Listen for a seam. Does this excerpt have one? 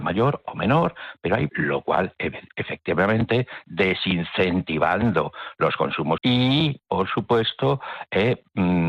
yes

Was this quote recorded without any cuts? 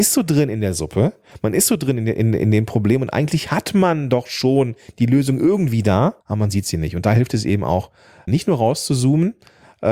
no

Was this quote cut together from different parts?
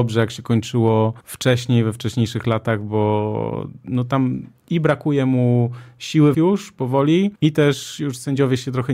yes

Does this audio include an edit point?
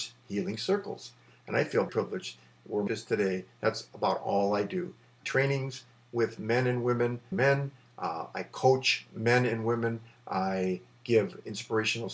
yes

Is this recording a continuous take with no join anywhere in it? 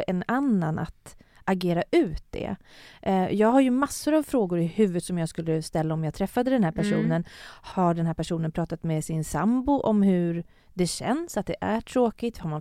yes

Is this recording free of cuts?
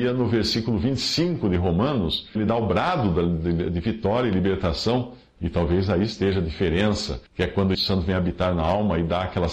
no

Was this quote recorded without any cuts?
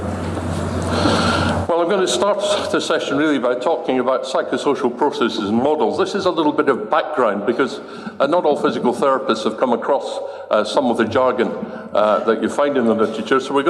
yes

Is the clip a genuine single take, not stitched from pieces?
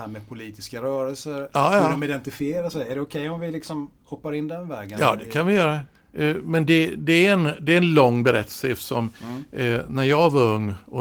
yes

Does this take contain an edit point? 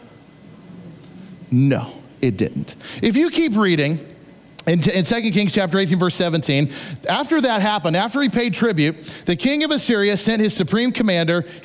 no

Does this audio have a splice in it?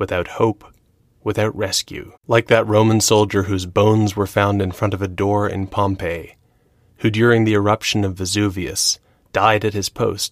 yes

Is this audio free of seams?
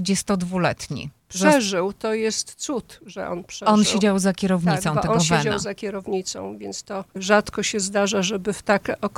no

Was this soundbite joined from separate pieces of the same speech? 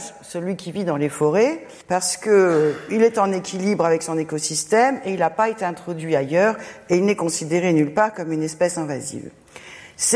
yes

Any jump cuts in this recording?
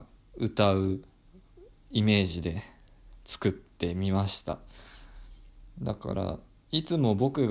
yes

